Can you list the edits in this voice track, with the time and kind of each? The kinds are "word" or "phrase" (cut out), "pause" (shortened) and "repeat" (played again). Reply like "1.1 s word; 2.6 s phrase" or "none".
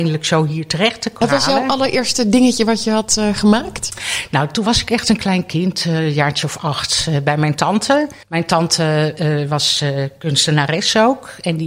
8.2 s pause